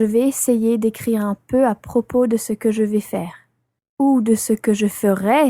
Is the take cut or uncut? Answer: uncut